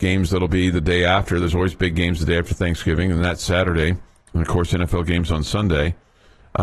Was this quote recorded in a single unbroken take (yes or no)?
yes